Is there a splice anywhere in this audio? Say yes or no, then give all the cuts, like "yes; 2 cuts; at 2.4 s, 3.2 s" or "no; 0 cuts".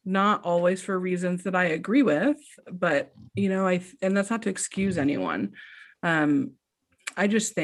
yes; 1 cut; at 3.3 s